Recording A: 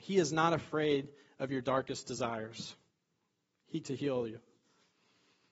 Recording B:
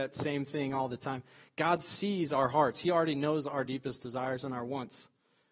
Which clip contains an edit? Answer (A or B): A